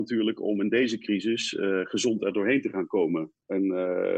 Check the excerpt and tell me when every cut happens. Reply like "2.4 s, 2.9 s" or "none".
none